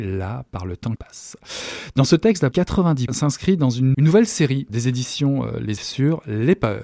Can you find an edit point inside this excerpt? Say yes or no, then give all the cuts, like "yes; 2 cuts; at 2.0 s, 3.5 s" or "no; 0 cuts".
yes; 6 cuts; at 1.0 s, 2.5 s, 3.1 s, 3.9 s, 4.7 s, 5.8 s